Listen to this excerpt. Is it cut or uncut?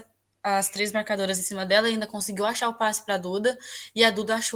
uncut